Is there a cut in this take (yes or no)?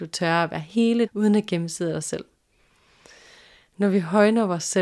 yes